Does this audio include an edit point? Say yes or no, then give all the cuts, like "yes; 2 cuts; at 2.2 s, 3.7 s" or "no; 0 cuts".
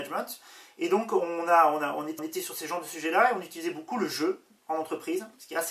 yes; 1 cut; at 2.2 s